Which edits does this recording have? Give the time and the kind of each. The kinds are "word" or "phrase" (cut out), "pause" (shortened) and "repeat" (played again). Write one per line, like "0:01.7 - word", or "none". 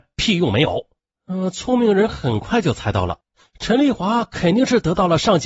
none